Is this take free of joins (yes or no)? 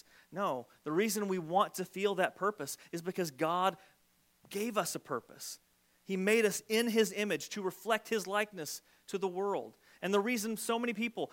yes